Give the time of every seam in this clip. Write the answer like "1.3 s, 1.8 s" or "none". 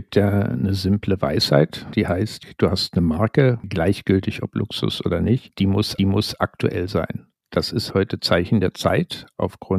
6.0 s